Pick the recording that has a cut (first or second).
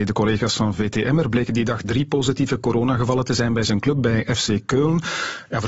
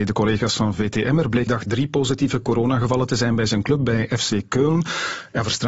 second